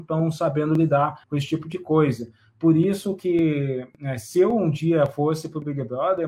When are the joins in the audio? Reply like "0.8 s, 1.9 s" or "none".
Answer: 1.2 s